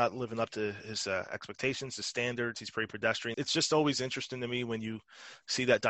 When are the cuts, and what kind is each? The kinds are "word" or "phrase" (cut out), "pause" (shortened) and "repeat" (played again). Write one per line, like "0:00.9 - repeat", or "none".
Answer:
0:03.3 - word